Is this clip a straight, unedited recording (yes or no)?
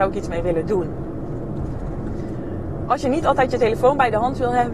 yes